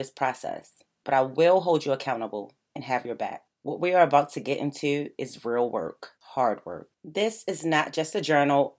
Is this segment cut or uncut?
cut